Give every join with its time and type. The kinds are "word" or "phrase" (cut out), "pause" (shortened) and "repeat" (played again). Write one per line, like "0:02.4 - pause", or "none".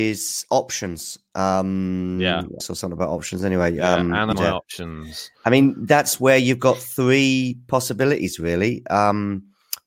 0:02.6 - phrase
0:04.3 - word